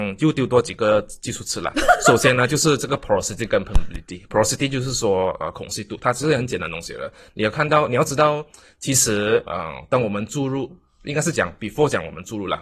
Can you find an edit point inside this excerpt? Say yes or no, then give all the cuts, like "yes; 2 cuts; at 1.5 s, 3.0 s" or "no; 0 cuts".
no; 0 cuts